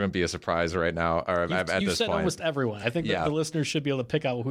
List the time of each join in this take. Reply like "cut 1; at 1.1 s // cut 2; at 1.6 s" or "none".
none